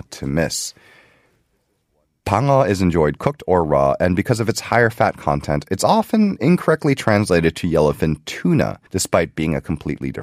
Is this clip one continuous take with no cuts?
no; 1 cut; at 8.9 s

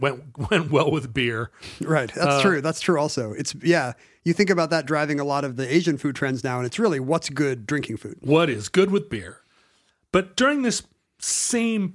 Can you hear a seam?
no; 0 cuts

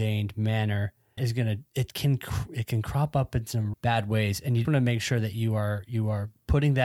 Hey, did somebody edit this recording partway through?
yes; 4 cuts; at 1.2 s, 1.7 s, 3.7 s, 4.6 s

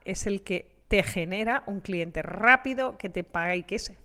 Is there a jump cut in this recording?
no; 0 cuts

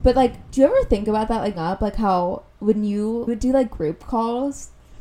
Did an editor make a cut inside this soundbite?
yes; 2 cuts; at 1.5 s, 3.3 s

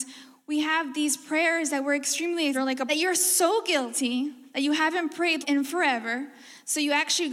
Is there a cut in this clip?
yes; 3 cuts; at 2.5 s, 2.9 s, 5.4 s

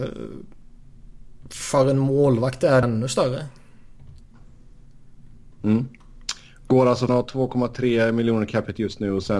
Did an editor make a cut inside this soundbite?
yes; 3 cuts; at 2.8 s, 5.5 s, 7.1 s

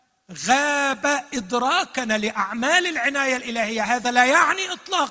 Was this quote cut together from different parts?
no; 0 cuts

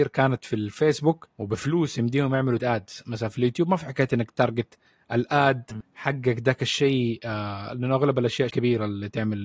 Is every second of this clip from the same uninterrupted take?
no; 3 cuts; at 1.3 s, 2.6 s, 8.5 s

